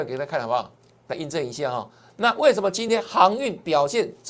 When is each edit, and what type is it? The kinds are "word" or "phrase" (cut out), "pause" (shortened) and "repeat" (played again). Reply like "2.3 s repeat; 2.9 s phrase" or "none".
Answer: none